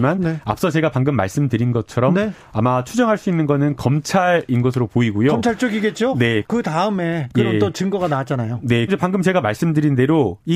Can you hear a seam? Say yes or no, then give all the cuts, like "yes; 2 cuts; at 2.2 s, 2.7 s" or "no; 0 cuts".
yes; 2 cuts; at 6.4 s, 8.9 s